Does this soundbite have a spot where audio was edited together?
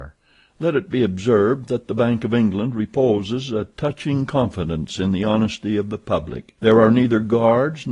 yes; 1 cut; at 6.6 s

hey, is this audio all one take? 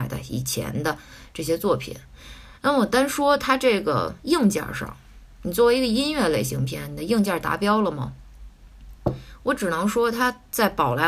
no; 1 cut; at 2.6 s

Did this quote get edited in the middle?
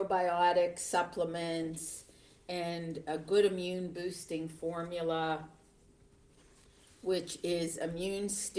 no; 0 cuts

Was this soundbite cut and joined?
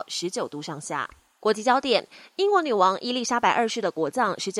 no; 0 cuts

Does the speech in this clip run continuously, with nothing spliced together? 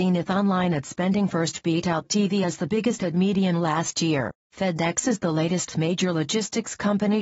yes; 0 cuts

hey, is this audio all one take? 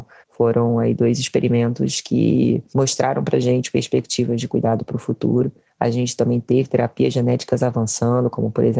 yes; 0 cuts

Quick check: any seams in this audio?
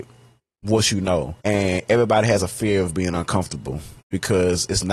yes; 2 cuts; at 1.4 s, 4.0 s

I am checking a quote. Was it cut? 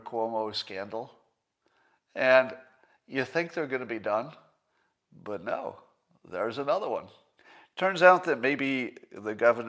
no; 0 cuts

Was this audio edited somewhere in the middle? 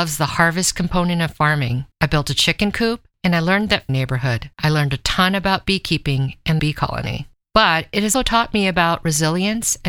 yes; 6 cuts; at 1.9 s, 3.9 s, 4.5 s, 6.6 s, 7.4 s, 8.1 s

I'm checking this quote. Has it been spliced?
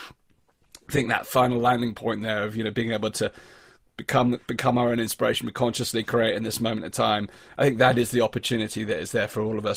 no; 0 cuts

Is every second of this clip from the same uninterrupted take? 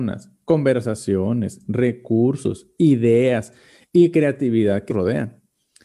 no; 1 cut; at 4.9 s

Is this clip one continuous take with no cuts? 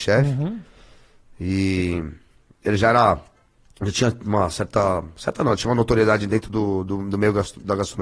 yes; 0 cuts

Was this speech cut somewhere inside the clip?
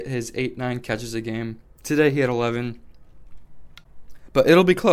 no; 0 cuts

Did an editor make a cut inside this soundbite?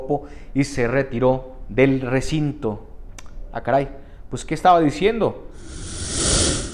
no; 0 cuts

